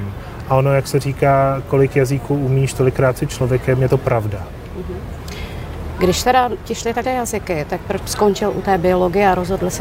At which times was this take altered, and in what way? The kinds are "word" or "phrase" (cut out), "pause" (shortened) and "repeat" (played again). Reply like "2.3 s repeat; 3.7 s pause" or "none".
7.0 s word; 8.0 s word